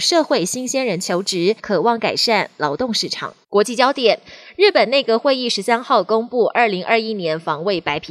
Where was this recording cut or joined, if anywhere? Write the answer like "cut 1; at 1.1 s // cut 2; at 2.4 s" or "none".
cut 1; at 1.6 s // cut 2; at 3.4 s

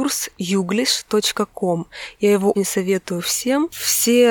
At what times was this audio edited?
cut 1; at 2.5 s

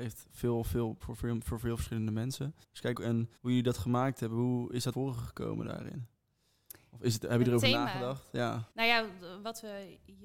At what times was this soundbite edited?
cut 1; at 1.0 s // cut 2; at 2.6 s // cut 3; at 2.9 s // cut 4; at 3.4 s // cut 5; at 4.9 s // cut 6; at 8.7 s

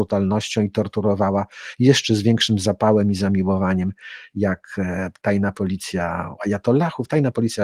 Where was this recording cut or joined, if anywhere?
cut 1; at 6.4 s

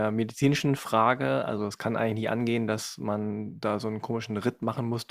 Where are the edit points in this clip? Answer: none

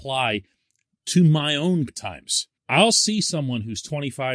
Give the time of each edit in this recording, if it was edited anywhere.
cut 1; at 1.9 s // cut 2; at 2.6 s

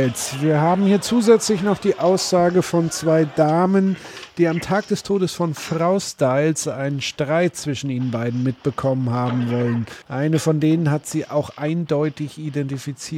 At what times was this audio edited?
cut 1; at 10.0 s

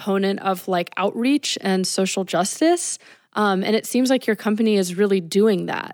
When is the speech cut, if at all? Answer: none

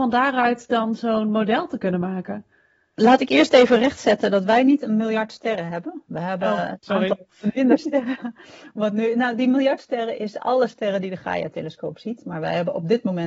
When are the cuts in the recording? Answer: none

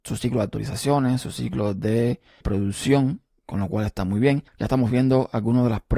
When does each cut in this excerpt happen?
cut 1; at 2.4 s // cut 2; at 4.5 s

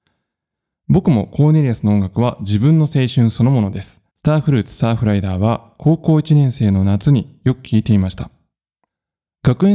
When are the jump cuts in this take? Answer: cut 1; at 4.1 s

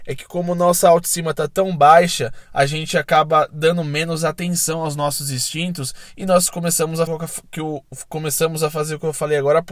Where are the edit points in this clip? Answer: cut 1; at 7.1 s

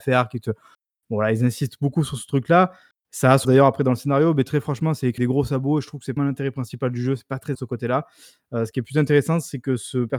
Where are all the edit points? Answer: cut 1; at 3.4 s // cut 2; at 5.2 s // cut 3; at 6.2 s // cut 4; at 7.5 s

